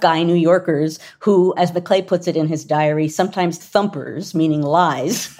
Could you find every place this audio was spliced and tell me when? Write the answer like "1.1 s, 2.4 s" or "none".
1.6 s, 3.6 s